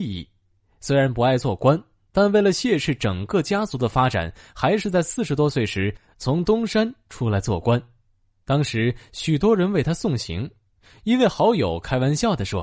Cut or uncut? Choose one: uncut